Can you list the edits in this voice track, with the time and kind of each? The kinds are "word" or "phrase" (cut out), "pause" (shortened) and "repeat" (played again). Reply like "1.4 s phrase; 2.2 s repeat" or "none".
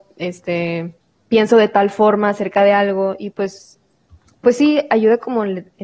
none